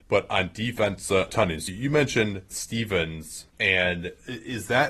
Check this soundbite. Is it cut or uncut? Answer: cut